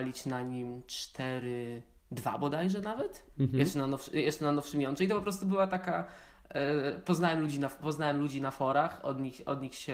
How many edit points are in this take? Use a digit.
0